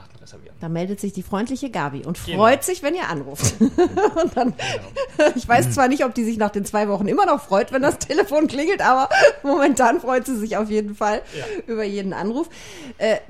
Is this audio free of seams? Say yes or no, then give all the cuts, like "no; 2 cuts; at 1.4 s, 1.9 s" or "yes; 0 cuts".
yes; 0 cuts